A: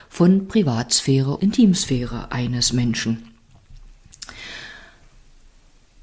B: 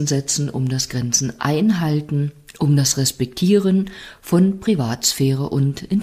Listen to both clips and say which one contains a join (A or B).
A